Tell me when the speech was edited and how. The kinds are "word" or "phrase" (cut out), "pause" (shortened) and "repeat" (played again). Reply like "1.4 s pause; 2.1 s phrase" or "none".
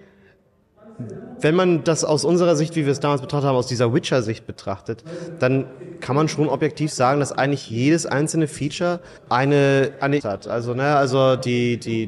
9.2 s pause; 10.2 s phrase